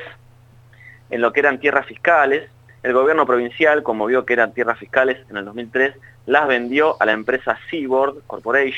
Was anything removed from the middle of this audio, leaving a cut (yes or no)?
no